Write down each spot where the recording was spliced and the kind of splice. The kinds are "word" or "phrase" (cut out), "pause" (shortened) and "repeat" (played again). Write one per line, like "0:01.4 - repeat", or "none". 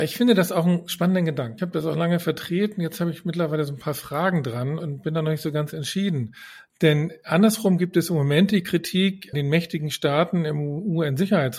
0:04.8 - word
0:09.3 - word